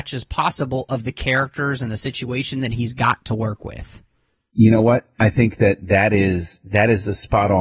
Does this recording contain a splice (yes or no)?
no